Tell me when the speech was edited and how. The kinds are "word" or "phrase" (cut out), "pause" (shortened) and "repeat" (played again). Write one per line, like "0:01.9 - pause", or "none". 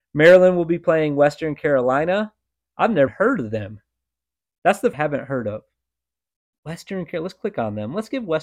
0:03.1 - word
0:04.9 - phrase